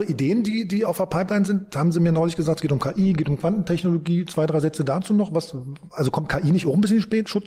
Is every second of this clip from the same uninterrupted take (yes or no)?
yes